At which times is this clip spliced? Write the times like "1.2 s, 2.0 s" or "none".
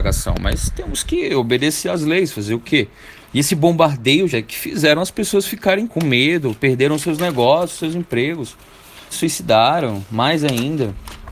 3.2 s, 4.3 s, 5.9 s, 9.1 s